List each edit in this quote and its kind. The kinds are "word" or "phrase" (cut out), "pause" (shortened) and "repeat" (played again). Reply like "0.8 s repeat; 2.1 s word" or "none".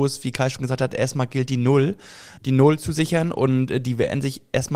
2.4 s word